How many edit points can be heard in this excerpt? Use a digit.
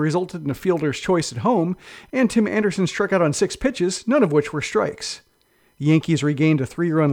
0